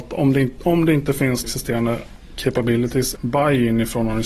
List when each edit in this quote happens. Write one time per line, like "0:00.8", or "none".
0:01.4
0:03.2